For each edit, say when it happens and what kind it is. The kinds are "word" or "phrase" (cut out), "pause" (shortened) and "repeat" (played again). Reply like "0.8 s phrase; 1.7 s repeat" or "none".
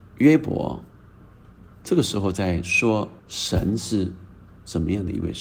1.7 s pause; 3.2 s pause